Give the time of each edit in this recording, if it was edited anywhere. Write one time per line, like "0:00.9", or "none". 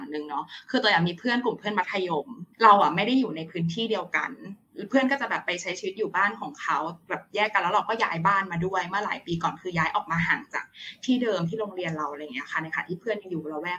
0:02.5